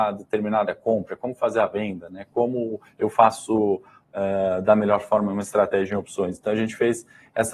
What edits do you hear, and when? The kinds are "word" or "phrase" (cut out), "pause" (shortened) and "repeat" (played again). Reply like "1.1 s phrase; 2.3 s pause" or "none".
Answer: none